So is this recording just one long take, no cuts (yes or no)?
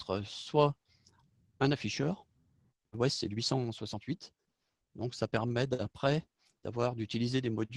yes